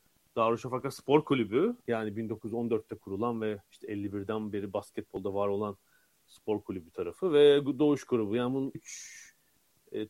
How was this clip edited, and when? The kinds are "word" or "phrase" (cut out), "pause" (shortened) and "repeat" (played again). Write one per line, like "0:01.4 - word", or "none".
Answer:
0:01.8 - pause
0:03.6 - pause
0:08.7 - word